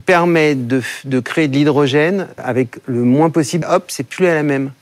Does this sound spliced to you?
yes; 2 cuts; at 2.4 s, 3.6 s

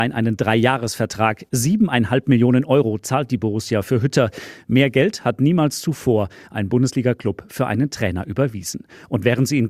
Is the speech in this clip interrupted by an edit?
no; 0 cuts

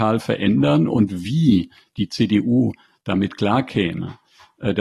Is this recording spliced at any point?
no; 0 cuts

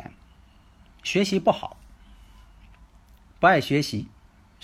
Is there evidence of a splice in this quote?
no; 0 cuts

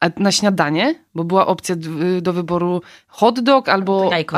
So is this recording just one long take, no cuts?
yes; 0 cuts

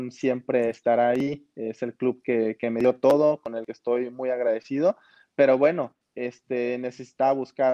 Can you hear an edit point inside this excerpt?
no; 0 cuts

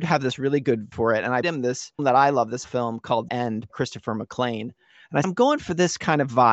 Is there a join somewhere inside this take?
yes; 7 cuts; at 0.9 s, 1.4 s, 2.0 s, 2.6 s, 3.3 s, 3.7 s, 5.2 s

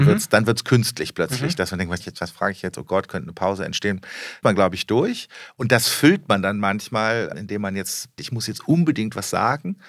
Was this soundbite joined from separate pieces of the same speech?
yes; 4 cuts; at 2.0 s, 4.4 s, 7.3 s, 8.2 s

